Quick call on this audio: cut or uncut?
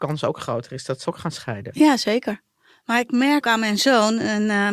cut